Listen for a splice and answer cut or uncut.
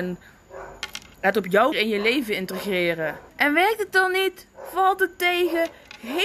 cut